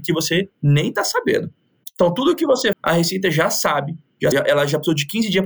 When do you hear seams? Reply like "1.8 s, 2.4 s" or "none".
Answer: 2.7 s, 4.3 s